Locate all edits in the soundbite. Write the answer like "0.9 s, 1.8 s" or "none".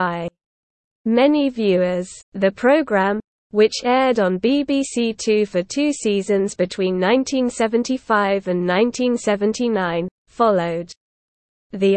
2.2 s